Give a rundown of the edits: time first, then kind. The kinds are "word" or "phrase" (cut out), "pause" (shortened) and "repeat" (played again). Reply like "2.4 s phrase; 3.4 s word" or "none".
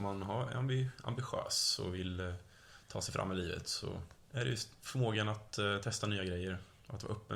4.2 s pause